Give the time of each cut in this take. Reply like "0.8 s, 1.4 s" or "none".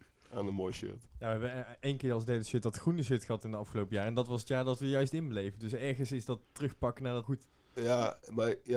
1.1 s, 7.2 s